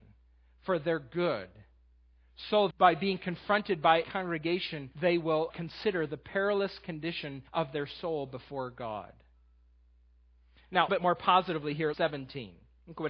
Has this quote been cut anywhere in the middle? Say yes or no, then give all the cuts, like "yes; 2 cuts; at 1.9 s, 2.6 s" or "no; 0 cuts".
yes; 7 cuts; at 2.7 s, 4.0 s, 4.9 s, 5.5 s, 7.5 s, 10.9 s, 11.9 s